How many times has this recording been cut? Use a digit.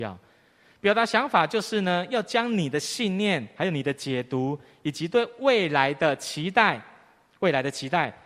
0